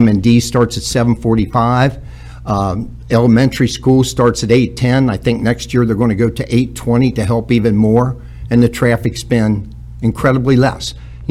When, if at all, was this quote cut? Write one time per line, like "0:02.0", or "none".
none